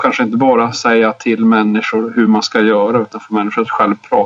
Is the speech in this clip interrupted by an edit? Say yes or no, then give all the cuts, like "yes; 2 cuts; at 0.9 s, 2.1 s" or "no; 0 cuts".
no; 0 cuts